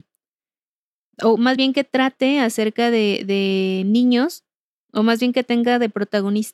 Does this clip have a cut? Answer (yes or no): no